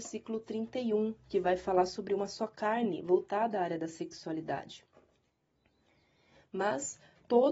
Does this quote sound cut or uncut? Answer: uncut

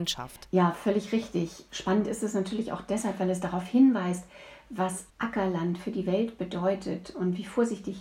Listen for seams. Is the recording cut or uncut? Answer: cut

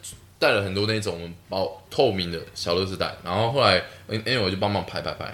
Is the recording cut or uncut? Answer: cut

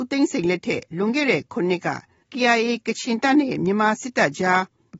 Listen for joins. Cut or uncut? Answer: uncut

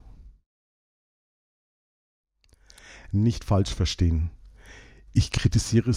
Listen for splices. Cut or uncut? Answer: uncut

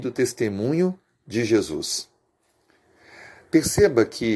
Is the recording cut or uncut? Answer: uncut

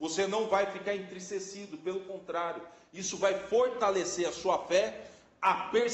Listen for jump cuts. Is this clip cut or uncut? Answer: uncut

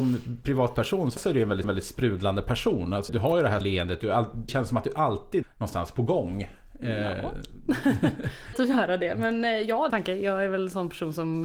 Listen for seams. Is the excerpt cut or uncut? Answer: cut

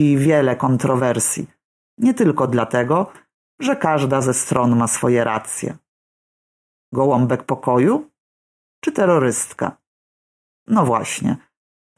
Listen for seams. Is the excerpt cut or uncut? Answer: uncut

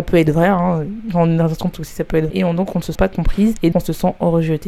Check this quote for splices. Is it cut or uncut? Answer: cut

